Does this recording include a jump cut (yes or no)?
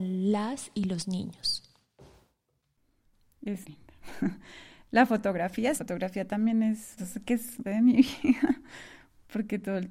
yes